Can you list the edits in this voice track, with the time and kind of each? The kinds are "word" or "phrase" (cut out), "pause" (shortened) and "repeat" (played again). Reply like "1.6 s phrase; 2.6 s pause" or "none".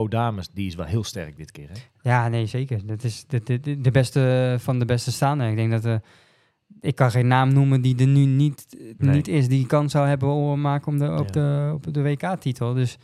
none